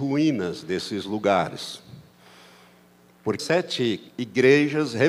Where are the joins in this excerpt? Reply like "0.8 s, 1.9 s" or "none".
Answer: 3.4 s, 4.1 s